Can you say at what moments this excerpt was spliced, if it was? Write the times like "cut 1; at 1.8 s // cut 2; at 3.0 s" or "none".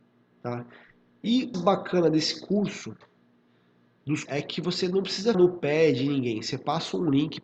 cut 1; at 1.5 s // cut 2; at 4.3 s // cut 3; at 5.3 s